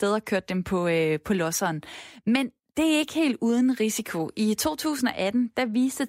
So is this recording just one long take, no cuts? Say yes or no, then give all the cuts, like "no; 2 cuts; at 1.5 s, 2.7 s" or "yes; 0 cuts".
yes; 0 cuts